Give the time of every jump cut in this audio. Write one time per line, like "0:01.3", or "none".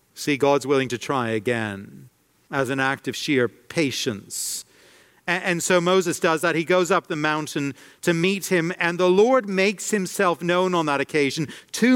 none